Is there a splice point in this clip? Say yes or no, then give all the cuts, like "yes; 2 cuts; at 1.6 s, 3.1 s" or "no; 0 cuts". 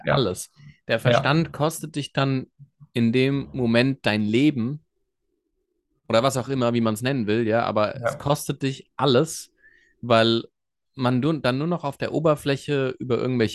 no; 0 cuts